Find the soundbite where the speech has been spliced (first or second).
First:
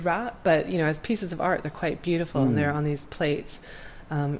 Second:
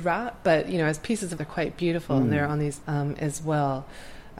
second